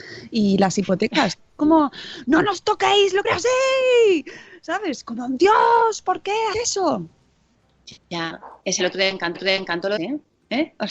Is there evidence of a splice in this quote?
yes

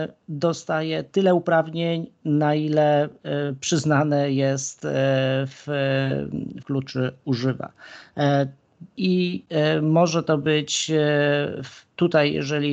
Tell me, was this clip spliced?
yes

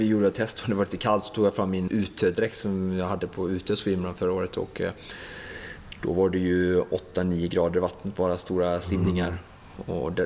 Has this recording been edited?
yes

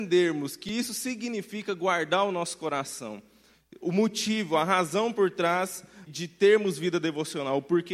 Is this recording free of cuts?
yes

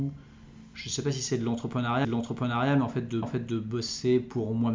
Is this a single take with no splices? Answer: no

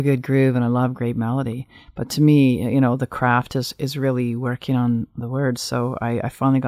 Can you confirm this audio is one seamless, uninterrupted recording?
yes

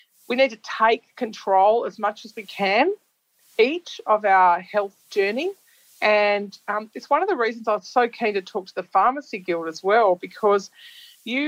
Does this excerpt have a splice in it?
no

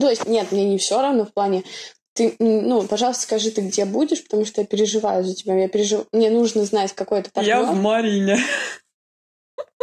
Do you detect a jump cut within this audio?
no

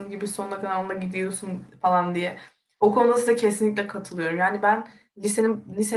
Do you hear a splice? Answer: no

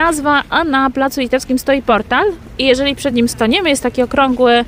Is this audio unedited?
yes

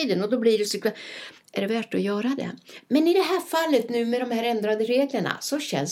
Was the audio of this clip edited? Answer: no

